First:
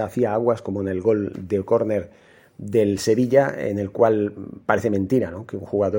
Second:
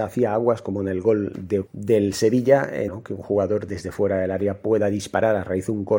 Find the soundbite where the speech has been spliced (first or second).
second